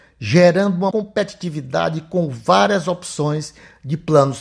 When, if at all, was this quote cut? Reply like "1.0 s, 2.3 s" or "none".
0.9 s